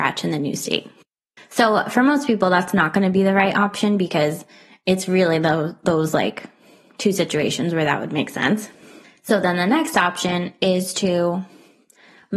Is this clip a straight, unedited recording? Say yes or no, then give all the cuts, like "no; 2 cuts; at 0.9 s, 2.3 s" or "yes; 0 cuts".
yes; 0 cuts